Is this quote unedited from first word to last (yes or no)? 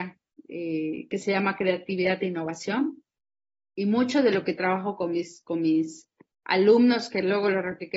yes